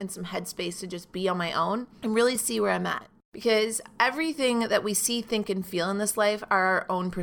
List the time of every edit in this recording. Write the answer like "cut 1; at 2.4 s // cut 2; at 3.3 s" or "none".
none

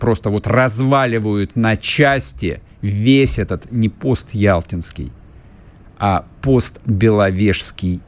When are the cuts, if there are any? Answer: none

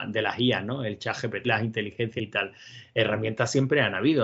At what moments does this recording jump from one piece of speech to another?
cut 1; at 1.4 s // cut 2; at 2.2 s

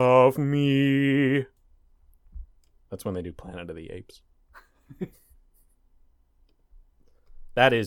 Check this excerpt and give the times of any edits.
none

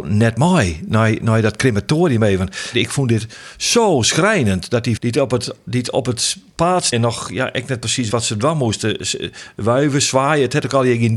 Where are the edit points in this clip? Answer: cut 1; at 5.0 s // cut 2; at 6.9 s // cut 3; at 8.1 s

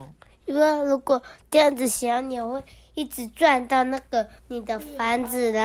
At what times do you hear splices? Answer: cut 1; at 4.4 s

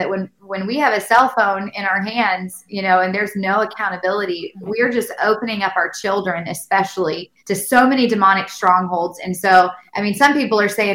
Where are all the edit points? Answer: cut 1; at 7.4 s // cut 2; at 9.9 s

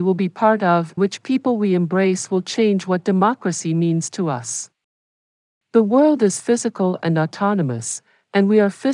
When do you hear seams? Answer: cut 1; at 1.0 s

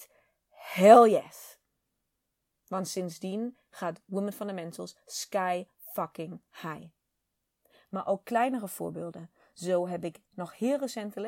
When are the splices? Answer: none

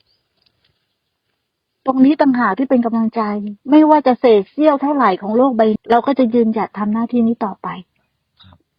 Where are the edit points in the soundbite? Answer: cut 1; at 3.6 s // cut 2; at 5.8 s

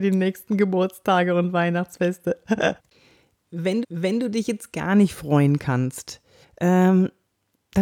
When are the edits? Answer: cut 1; at 2.8 s // cut 2; at 3.8 s // cut 3; at 6.4 s

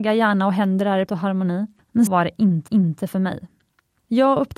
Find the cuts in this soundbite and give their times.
cut 1; at 1.1 s // cut 2; at 2.1 s // cut 3; at 2.7 s

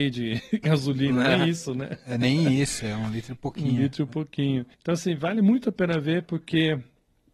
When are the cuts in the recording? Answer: cut 1; at 4.7 s

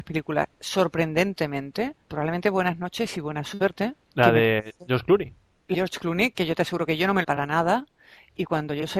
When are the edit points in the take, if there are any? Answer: cut 1; at 2.0 s // cut 2; at 4.0 s // cut 3; at 5.7 s // cut 4; at 7.2 s

